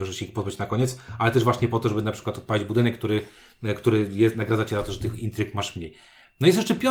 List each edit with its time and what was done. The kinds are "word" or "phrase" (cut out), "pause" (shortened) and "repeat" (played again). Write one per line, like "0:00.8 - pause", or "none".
none